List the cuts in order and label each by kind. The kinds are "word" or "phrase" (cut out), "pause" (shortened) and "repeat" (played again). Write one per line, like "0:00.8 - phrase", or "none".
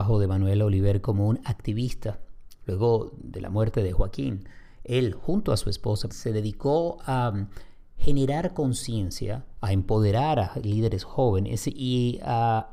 0:06.1 - word